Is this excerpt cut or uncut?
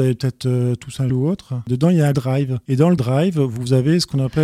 cut